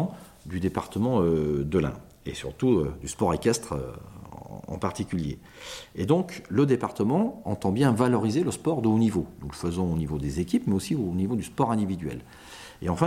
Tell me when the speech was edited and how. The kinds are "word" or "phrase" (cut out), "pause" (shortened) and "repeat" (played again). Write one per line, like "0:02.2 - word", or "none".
none